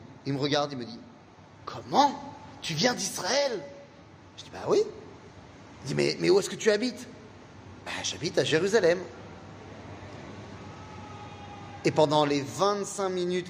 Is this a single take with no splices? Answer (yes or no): yes